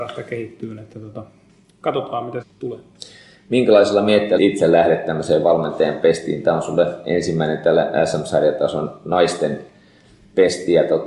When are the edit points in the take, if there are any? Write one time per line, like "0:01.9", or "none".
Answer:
0:02.4
0:04.4